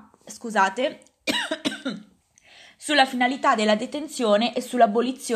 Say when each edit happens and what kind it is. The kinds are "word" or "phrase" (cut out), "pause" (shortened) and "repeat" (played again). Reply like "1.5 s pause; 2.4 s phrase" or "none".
2.2 s pause